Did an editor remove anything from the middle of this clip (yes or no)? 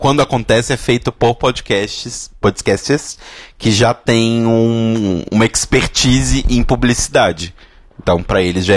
no